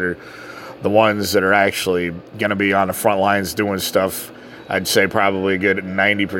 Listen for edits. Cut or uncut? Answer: uncut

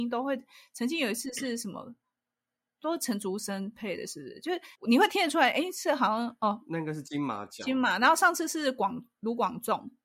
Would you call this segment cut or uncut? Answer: cut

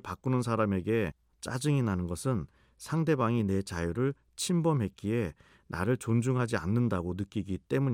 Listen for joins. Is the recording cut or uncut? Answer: uncut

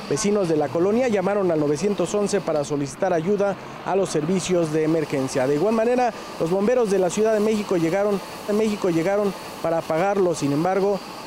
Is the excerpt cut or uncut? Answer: cut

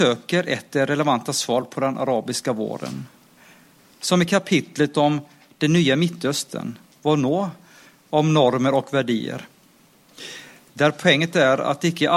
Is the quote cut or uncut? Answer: uncut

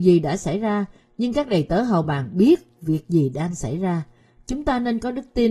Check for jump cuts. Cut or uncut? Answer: uncut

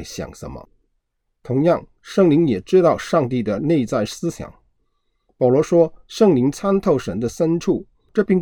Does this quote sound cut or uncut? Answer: uncut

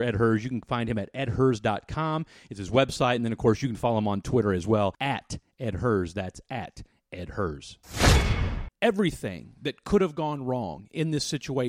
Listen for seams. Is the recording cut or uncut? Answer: uncut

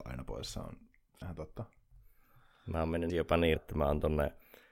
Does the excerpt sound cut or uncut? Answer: cut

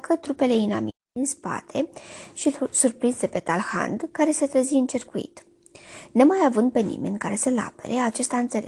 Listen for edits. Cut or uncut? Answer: uncut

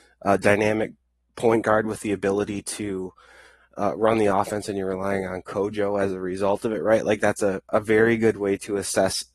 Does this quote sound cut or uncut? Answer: uncut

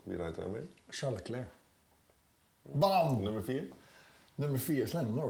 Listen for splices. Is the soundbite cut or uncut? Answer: uncut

